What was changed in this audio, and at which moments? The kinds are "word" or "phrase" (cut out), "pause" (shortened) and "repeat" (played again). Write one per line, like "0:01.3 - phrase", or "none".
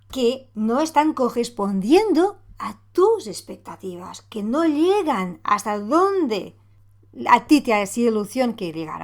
none